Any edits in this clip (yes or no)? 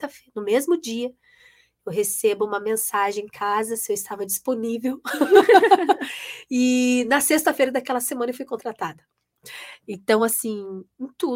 no